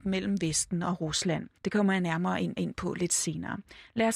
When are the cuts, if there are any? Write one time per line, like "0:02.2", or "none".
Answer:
0:01.6
0:02.6